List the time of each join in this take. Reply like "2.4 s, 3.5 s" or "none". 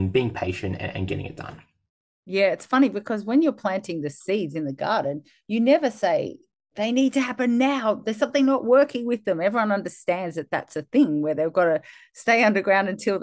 none